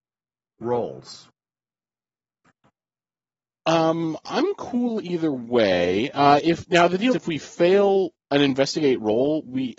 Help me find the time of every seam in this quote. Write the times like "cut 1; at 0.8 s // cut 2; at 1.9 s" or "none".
cut 1; at 7.1 s